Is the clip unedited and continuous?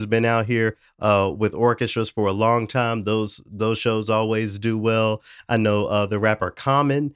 yes; 0 cuts

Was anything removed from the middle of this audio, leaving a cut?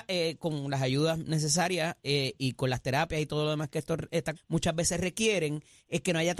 yes; 2 cuts; at 2.4 s, 4.4 s

